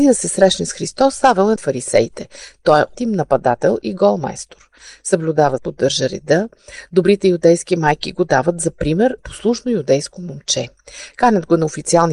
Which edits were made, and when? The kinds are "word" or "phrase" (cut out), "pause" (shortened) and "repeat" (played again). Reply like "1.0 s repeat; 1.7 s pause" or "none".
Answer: 1.6 s phrase; 2.9 s word; 5.6 s word; 9.2 s word